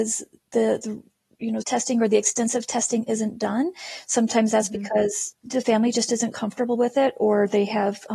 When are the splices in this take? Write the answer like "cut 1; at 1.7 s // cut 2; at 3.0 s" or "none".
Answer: cut 1; at 1.6 s // cut 2; at 5.3 s